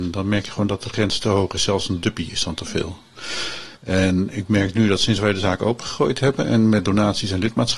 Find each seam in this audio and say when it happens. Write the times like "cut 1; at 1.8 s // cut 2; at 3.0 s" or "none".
cut 1; at 3.8 s

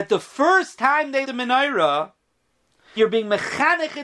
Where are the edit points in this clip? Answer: cut 1; at 1.2 s // cut 2; at 3.0 s

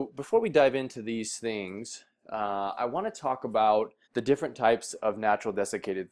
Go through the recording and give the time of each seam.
cut 1; at 4.0 s

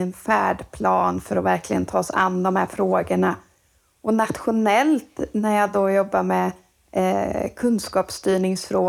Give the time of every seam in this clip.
none

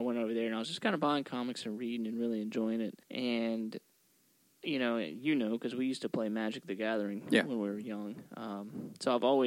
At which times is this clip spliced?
cut 1; at 3.0 s

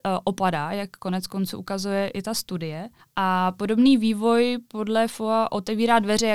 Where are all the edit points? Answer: cut 1; at 3.0 s

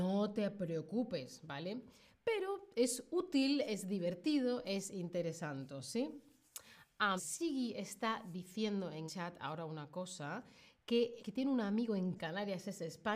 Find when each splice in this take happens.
cut 1; at 7.2 s // cut 2; at 9.1 s // cut 3; at 11.2 s // cut 4; at 12.2 s

